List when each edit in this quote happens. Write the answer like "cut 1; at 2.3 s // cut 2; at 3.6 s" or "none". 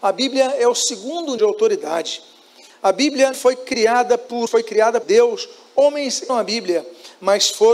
cut 1; at 1.4 s // cut 2; at 3.3 s // cut 3; at 4.5 s // cut 4; at 5.0 s // cut 5; at 6.3 s